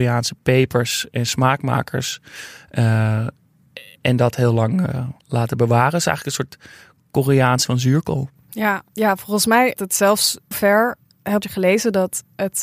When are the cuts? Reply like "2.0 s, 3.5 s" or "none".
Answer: 5.2 s, 7.6 s, 8.9 s, 9.8 s, 10.5 s, 11.4 s